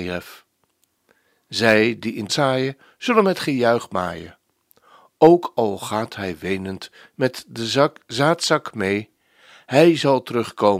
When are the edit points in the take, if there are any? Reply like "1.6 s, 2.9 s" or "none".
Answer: 2.3 s